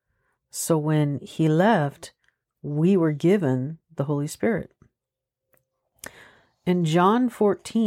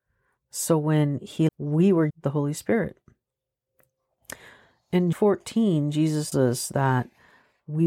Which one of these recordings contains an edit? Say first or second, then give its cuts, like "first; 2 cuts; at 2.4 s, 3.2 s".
second; 4 cuts; at 1.5 s, 2.1 s, 5.1 s, 6.3 s